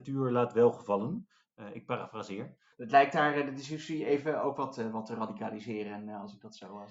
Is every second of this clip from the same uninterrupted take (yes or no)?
yes